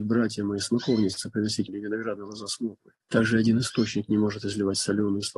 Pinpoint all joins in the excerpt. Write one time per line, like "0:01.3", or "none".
0:01.7
0:03.0